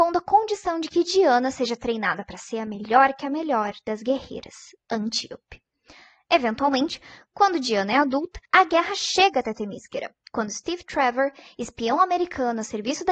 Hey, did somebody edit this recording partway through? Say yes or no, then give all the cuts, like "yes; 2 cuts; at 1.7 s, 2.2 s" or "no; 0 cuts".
yes; 1 cut; at 8.5 s